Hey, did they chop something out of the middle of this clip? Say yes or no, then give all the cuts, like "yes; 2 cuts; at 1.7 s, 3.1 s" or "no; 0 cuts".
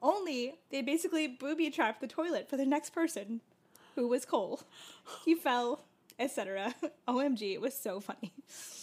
no; 0 cuts